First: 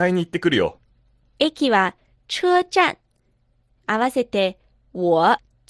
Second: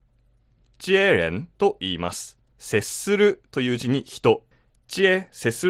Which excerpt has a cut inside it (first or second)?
second